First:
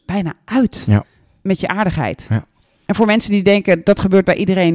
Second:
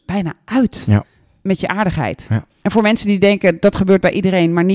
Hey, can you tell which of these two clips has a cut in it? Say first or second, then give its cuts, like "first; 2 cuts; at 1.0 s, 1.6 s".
second; 1 cut; at 2.5 s